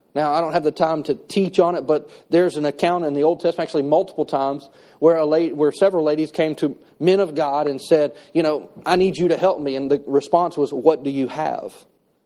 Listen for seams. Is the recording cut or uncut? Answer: uncut